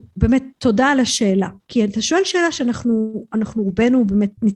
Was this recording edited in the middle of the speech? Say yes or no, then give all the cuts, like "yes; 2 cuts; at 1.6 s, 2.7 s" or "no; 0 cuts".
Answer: no; 0 cuts